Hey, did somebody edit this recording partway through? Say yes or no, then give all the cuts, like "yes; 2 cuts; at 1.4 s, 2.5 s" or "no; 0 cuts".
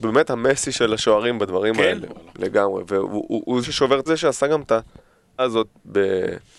yes; 4 cuts; at 2.3 s, 3.6 s, 4.1 s, 5.4 s